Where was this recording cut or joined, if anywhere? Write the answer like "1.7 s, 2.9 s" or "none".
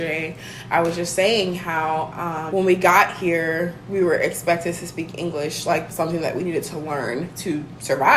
2.5 s, 5.9 s